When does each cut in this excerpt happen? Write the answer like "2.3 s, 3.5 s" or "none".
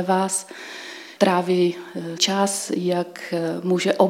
1.2 s, 2.2 s